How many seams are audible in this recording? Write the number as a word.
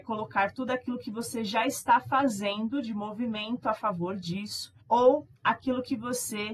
one